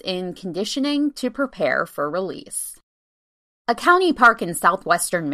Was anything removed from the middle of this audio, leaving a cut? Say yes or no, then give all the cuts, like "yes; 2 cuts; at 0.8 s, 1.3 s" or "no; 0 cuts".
no; 0 cuts